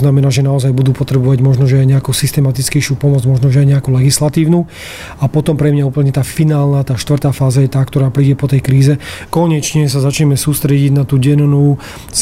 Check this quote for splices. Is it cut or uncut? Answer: cut